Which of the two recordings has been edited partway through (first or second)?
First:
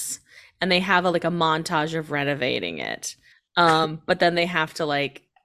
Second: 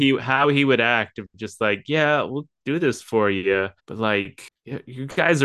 second